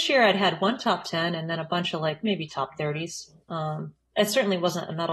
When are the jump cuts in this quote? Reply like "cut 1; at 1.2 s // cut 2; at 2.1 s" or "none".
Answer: cut 1; at 3.4 s

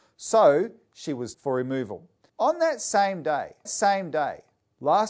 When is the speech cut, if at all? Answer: cut 1; at 1.3 s // cut 2; at 2.3 s // cut 3; at 3.7 s

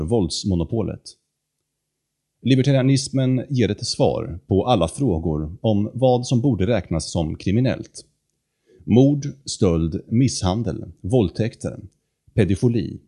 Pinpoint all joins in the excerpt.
none

